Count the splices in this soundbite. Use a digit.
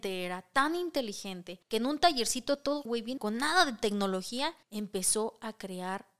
4